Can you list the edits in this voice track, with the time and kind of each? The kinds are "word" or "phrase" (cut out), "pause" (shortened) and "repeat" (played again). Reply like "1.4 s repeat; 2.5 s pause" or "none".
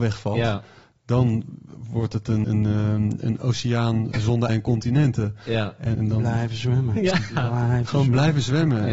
2.4 s word; 4.1 s word; 4.5 s word; 5.9 s word

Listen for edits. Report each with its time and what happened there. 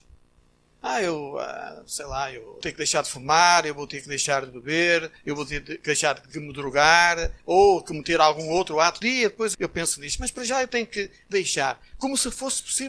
2.6 s phrase; 5.2 s pause; 6.3 s word; 7.4 s pause; 9.0 s phrase; 9.5 s word

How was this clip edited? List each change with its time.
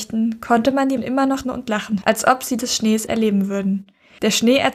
1.0 s word; 1.4 s word; 2.0 s word; 2.6 s word; 3.1 s word

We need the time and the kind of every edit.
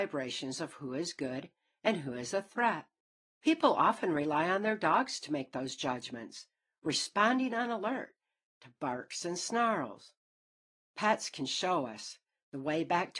none

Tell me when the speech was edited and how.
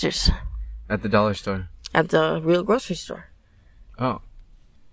none

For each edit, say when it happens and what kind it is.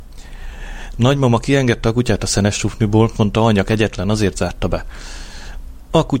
3.1 s word

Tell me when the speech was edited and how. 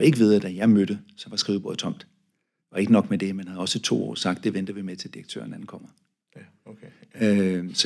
none

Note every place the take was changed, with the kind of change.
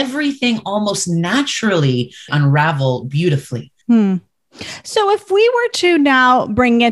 2.3 s phrase; 3.8 s pause

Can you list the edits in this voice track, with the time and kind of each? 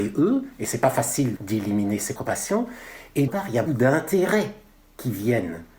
1.4 s word; 2.2 s word; 3.3 s word; 3.7 s word

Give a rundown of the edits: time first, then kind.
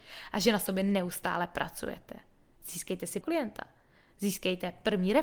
3.2 s word

